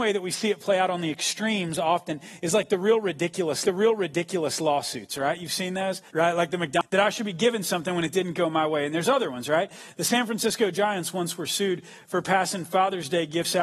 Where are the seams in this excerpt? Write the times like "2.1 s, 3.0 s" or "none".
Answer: 3.6 s, 6.1 s

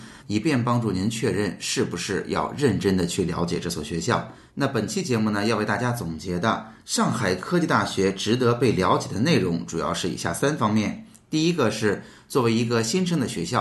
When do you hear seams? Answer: none

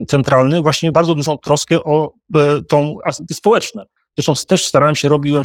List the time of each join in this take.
0.9 s, 3.3 s

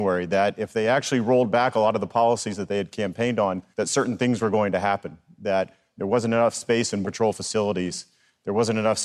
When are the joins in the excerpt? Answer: 3.7 s, 7.0 s

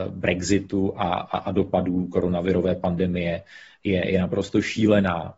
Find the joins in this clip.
none

